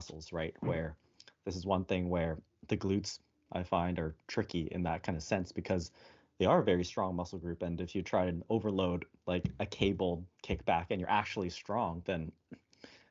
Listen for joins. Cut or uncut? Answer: uncut